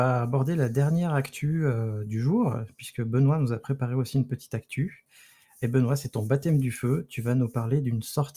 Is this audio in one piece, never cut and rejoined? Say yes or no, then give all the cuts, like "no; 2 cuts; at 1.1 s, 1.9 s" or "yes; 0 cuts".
yes; 0 cuts